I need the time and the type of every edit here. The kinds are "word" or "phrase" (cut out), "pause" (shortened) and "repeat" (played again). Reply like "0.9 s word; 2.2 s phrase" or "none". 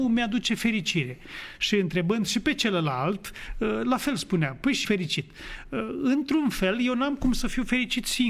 4.8 s phrase